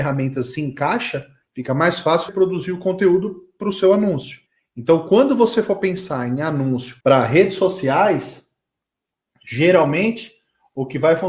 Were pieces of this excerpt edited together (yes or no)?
yes